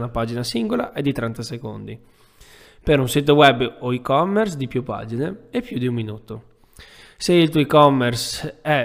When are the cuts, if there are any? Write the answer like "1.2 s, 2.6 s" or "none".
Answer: none